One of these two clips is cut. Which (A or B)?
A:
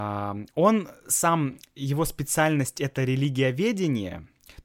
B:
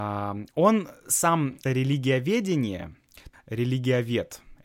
B